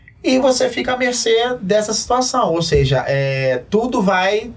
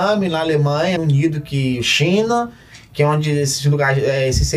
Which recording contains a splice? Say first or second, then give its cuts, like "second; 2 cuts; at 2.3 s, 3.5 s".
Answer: second; 1 cut; at 1.0 s